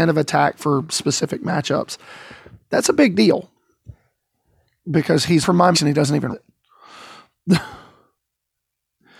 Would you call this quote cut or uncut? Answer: cut